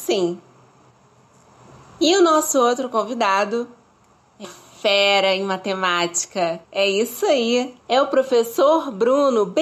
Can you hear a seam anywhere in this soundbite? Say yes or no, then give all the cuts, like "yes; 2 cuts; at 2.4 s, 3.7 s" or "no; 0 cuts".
yes; 3 cuts; at 4.4 s, 6.6 s, 7.8 s